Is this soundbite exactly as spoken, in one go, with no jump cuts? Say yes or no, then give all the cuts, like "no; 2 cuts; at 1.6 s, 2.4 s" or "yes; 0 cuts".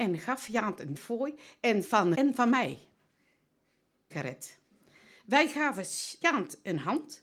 no; 5 cuts; at 1.0 s, 1.8 s, 2.1 s, 4.1 s, 6.2 s